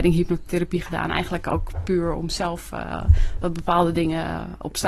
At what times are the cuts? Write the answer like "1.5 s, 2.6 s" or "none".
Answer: none